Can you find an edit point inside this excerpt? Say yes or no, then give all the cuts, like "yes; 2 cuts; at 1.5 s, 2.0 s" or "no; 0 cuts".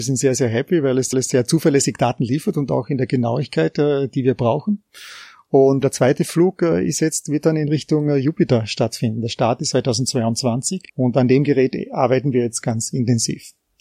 yes; 5 cuts; at 1.1 s, 5.8 s, 9.7 s, 10.9 s, 12.6 s